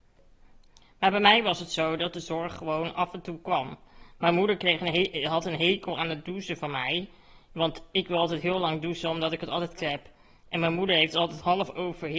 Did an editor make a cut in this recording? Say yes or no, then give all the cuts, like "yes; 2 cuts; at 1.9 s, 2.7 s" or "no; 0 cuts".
yes; 1 cut; at 9.8 s